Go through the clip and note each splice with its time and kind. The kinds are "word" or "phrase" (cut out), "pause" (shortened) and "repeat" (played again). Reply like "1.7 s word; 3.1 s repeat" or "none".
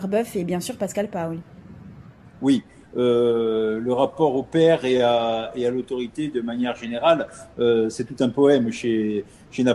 2.2 s pause